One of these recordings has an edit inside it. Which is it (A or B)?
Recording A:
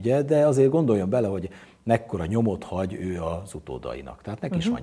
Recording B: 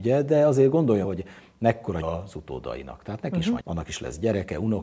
B